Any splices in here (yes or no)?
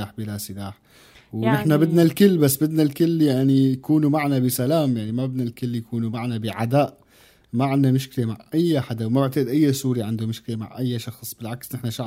no